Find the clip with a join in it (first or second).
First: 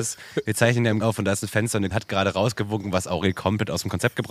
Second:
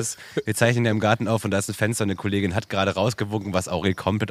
first